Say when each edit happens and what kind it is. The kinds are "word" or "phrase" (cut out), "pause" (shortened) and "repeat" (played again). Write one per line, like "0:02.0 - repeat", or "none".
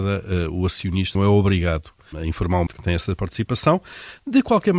0:01.1 - word
0:02.1 - word
0:02.7 - word

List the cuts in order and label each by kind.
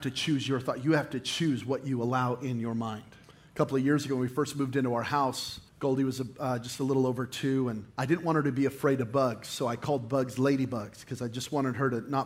0:03.2 - pause
0:05.7 - pause
0:07.9 - pause

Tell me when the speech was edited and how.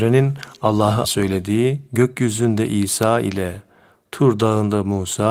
0:01.0 - word
0:01.9 - pause

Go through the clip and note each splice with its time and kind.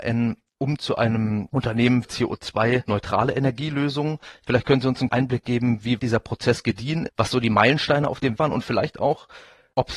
0:02.0 - word
0:05.1 - word
0:06.0 - word
0:07.1 - word
0:08.4 - word

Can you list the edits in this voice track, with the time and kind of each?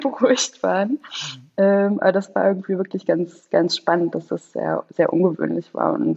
none

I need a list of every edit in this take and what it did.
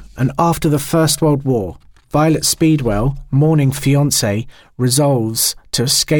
0:03.8 - word

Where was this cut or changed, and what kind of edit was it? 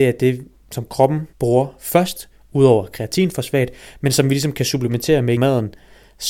0:01.3 - pause
0:05.4 - word

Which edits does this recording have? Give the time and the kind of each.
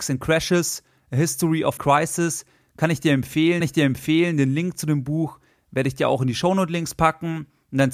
0:01.8 - word
0:03.6 - repeat

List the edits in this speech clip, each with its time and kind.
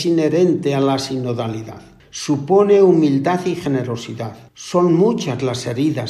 0:02.0 - pause
0:04.5 - pause

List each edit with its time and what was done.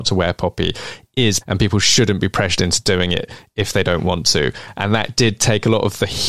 0:01.4 - word

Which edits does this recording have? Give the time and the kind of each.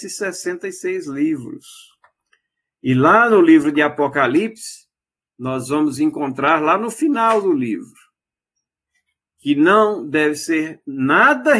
none

